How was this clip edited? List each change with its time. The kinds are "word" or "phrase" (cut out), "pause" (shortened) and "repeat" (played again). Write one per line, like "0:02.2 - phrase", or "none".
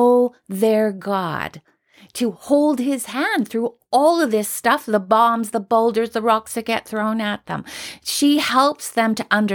none